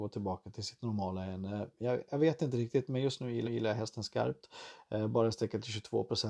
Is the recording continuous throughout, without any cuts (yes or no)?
no